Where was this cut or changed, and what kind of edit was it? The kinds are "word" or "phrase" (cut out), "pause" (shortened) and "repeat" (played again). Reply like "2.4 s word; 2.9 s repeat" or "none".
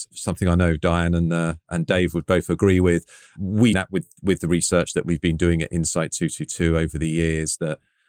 3.7 s word